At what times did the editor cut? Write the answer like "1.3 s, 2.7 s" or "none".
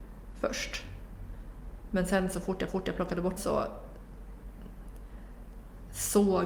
2.7 s, 3.4 s